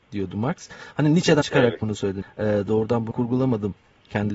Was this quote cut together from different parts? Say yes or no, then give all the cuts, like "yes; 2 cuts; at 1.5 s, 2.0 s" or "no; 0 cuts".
yes; 3 cuts; at 1.4 s, 2.2 s, 3.1 s